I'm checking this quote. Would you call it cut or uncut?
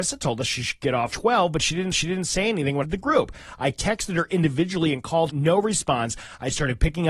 cut